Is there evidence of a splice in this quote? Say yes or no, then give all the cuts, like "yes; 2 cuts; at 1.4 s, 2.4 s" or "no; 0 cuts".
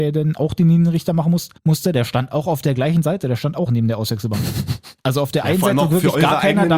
yes; 3 cuts; at 1.6 s, 3.7 s, 5.0 s